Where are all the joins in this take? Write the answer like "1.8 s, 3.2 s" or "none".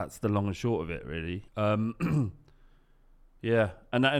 1.5 s